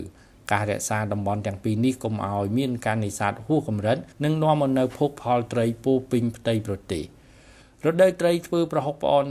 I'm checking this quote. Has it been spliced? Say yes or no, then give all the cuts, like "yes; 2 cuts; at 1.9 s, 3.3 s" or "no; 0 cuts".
yes; 1 cut; at 4.1 s